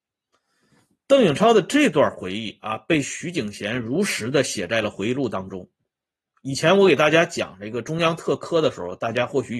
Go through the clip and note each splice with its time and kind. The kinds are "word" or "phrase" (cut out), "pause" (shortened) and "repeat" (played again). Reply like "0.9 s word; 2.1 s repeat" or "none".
none